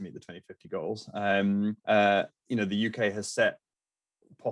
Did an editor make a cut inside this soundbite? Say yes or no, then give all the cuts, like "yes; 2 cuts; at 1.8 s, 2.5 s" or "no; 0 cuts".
yes; 1 cut; at 1.8 s